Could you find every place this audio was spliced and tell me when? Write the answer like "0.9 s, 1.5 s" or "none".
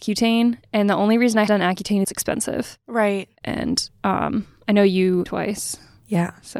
1.5 s, 2.0 s, 3.4 s, 5.3 s